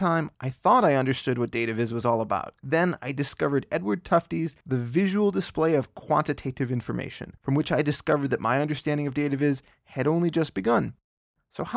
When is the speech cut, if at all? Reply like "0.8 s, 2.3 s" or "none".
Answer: 2.6 s, 4.6 s, 7.4 s